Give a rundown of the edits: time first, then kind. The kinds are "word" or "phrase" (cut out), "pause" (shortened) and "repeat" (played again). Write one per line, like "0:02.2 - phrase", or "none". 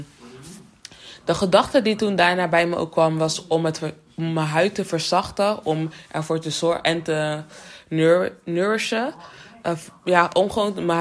none